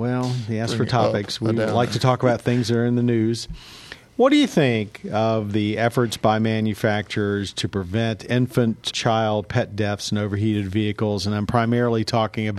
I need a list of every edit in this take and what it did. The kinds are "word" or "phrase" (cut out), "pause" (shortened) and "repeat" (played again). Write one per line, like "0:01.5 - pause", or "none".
0:08.9 - word